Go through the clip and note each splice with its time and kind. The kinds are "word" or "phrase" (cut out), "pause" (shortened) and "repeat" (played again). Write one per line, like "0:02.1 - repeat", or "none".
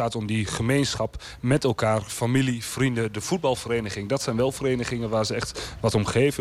none